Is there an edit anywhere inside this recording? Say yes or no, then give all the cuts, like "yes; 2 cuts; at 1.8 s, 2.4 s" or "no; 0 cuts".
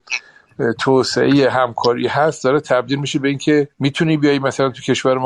yes; 1 cut; at 3.7 s